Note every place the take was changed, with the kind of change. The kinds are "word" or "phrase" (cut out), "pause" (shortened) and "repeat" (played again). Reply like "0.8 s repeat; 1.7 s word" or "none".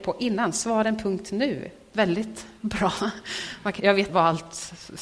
1.9 s word; 3.8 s word; 4.1 s word